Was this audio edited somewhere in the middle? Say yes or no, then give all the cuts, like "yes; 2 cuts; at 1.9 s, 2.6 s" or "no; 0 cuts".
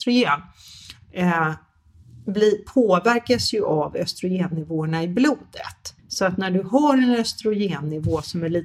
yes; 1 cut; at 6.0 s